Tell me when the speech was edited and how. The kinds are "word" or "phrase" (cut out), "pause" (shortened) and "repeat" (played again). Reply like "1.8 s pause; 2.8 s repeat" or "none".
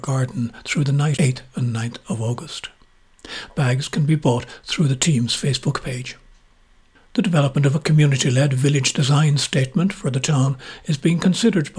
1.2 s word